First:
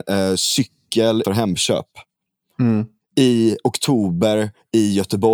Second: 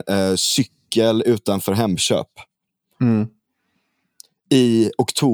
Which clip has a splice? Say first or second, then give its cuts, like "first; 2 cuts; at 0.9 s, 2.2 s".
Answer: first; 2 cuts; at 1.2 s, 3.0 s